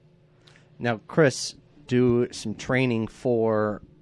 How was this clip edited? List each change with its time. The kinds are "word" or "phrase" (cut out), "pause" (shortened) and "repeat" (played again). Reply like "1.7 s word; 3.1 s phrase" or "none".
1.9 s phrase